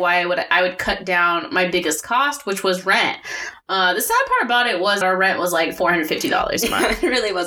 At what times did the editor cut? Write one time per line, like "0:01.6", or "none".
0:05.0